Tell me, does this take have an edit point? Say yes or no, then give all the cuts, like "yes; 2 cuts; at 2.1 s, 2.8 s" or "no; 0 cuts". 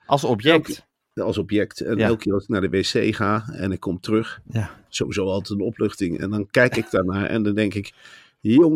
no; 0 cuts